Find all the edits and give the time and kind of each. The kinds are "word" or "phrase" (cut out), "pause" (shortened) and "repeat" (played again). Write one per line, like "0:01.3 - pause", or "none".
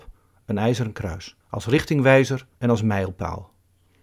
0:01.4 - pause
0:02.5 - pause